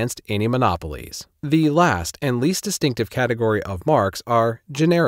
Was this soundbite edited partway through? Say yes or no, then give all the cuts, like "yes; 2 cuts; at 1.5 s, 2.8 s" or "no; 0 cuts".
yes; 1 cut; at 1.4 s